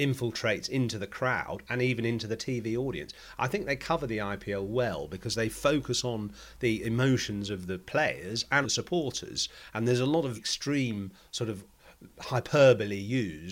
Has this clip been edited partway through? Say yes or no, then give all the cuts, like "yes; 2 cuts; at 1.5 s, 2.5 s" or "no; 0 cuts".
yes; 2 cuts; at 8.6 s, 10.4 s